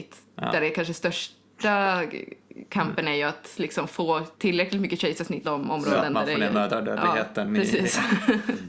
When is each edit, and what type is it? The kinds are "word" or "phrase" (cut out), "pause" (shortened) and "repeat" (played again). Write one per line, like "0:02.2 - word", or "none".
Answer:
0:04.3 - pause
0:05.4 - word